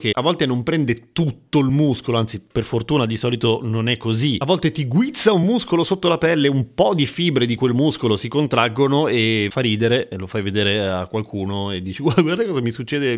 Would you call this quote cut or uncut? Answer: uncut